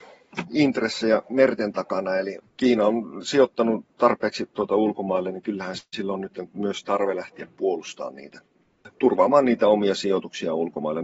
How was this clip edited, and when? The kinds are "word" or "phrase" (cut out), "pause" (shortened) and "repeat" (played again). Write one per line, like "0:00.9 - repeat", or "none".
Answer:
0:02.5 - pause
0:08.9 - pause